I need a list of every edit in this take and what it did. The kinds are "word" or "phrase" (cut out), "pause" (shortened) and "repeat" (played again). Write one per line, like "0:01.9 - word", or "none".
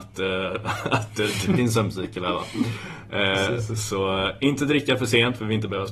0:01.5 - phrase